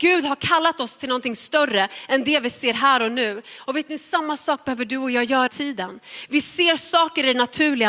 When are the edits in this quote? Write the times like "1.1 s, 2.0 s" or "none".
5.5 s